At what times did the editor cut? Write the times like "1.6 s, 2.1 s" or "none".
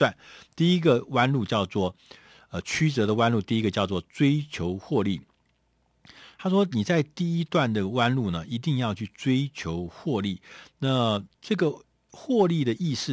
none